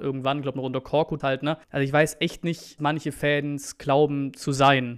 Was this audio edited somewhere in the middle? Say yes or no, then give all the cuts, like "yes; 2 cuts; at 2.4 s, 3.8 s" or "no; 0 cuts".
yes; 3 cuts; at 1.2 s, 1.6 s, 2.8 s